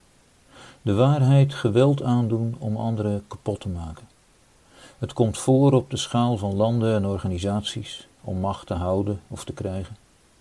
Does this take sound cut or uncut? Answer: uncut